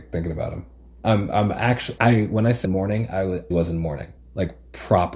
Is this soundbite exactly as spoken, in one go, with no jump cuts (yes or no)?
no